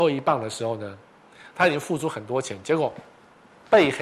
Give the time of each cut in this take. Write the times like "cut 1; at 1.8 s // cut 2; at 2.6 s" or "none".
none

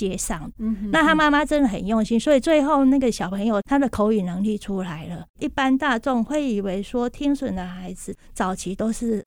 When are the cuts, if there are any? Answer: cut 1; at 5.3 s

